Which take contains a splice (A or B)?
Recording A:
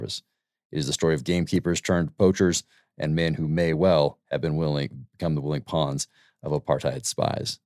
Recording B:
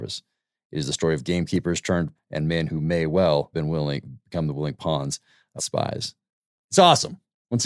B